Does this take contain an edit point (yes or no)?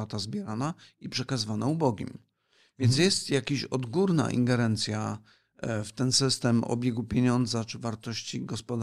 no